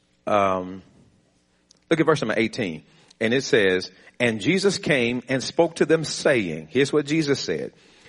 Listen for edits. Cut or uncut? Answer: uncut